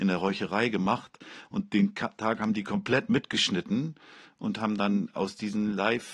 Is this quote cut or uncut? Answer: uncut